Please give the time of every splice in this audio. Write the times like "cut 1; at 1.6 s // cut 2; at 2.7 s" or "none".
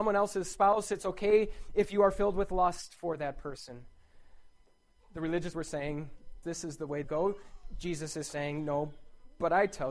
cut 1; at 5.5 s // cut 2; at 6.4 s // cut 3; at 7.0 s